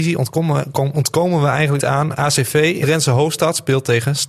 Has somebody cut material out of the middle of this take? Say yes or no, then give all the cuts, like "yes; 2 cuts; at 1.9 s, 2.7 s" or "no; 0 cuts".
yes; 2 cuts; at 1.8 s, 2.8 s